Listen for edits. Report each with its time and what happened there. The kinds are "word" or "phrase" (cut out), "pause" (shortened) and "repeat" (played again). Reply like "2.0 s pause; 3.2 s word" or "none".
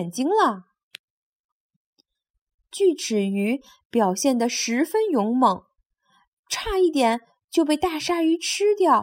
none